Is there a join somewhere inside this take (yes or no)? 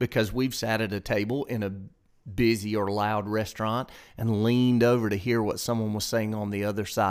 no